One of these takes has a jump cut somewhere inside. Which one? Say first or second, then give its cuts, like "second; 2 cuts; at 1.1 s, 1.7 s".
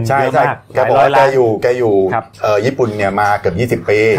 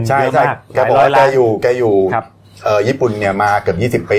first; 1 cut; at 2.3 s